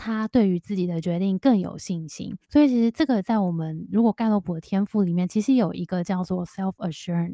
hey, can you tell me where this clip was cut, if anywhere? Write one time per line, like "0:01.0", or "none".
0:02.4